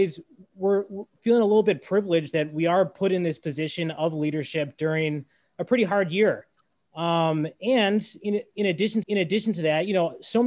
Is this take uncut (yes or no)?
no